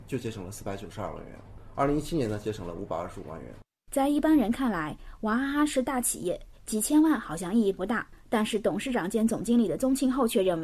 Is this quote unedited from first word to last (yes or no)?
yes